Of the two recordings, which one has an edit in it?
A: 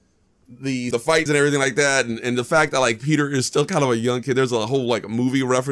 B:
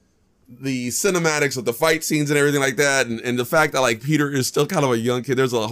A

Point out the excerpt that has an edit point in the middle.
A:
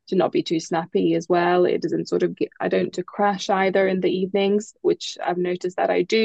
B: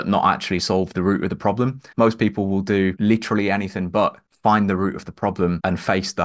A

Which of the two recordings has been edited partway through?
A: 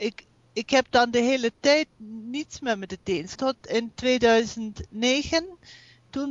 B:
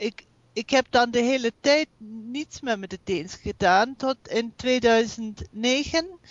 A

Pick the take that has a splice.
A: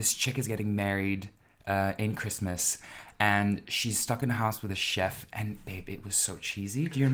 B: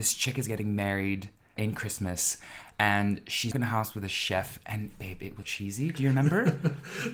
B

